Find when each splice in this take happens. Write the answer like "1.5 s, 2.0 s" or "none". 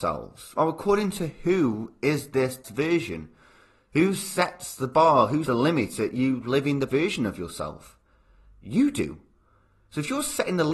2.6 s, 5.5 s, 6.9 s